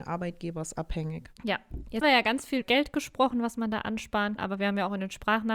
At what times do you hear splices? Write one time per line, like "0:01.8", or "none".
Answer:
0:01.4
0:02.0
0:02.6
0:04.4